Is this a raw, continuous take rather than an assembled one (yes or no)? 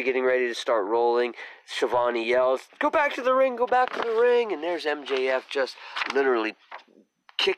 yes